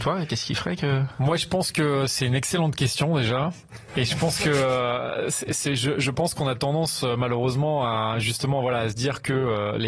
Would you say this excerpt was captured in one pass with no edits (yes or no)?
yes